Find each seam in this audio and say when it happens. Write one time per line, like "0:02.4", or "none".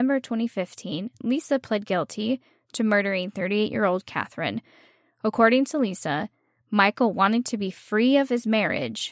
none